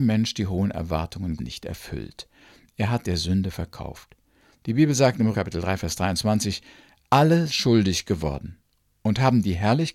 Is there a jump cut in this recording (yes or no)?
yes